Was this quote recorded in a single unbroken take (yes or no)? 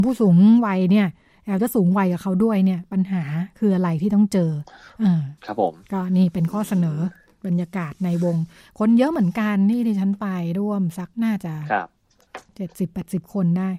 no